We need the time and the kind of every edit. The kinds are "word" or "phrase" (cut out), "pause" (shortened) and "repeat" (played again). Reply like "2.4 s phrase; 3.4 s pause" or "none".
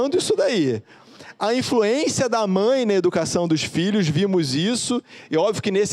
none